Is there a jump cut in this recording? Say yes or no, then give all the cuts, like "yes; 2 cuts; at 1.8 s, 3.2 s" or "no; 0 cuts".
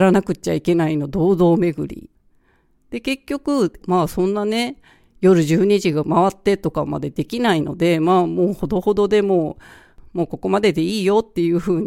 yes; 1 cut; at 3.8 s